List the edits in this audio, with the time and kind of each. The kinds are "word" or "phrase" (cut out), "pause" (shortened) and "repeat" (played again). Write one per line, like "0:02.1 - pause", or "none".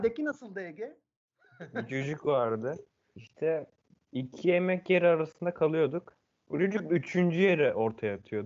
none